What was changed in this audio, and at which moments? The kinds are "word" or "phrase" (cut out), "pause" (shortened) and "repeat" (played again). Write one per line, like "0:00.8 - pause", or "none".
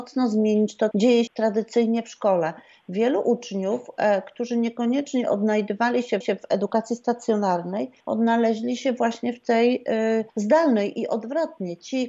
0:00.9 - word
0:01.3 - word
0:06.2 - repeat
0:08.0 - pause
0:10.3 - pause